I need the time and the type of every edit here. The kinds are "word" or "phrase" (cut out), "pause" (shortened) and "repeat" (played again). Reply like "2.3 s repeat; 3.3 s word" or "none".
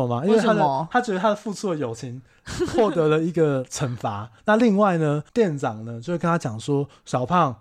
4.4 s pause; 5.3 s pause